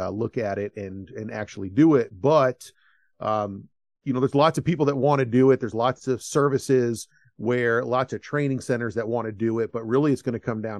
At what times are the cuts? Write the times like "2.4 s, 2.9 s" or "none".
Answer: none